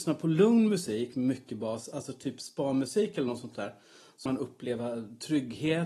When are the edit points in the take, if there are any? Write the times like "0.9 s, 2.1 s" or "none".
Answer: 4.3 s